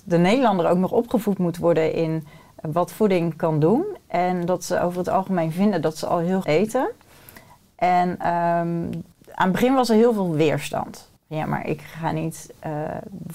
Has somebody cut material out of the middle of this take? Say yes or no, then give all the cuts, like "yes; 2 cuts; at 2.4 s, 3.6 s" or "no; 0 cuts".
yes; 3 cuts; at 6.4 s, 9.1 s, 11.2 s